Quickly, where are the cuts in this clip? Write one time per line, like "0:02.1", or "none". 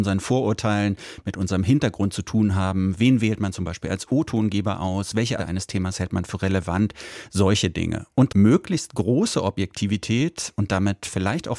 0:05.4
0:08.3